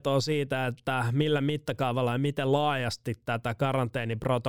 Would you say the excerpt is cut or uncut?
uncut